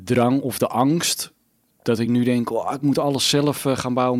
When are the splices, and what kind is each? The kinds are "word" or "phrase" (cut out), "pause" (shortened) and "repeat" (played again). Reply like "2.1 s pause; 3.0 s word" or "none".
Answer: none